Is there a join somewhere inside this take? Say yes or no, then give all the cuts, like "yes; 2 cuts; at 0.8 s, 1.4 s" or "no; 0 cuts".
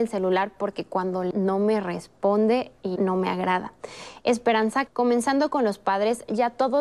yes; 3 cuts; at 1.3 s, 3.0 s, 4.9 s